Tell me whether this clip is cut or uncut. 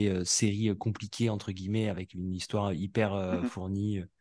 uncut